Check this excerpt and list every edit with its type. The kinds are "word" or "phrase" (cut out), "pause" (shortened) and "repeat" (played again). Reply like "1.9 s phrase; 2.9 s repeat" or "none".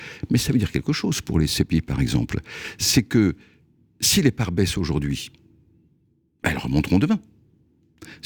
none

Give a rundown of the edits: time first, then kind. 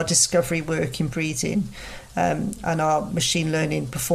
1.1 s word

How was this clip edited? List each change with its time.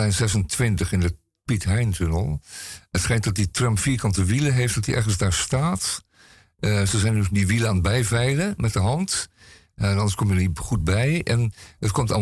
none

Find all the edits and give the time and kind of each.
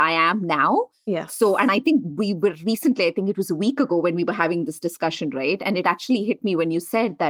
none

